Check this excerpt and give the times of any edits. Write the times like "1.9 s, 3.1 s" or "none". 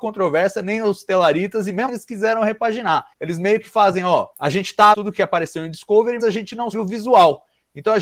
1.9 s, 3.1 s, 4.3 s, 4.9 s, 6.2 s, 6.7 s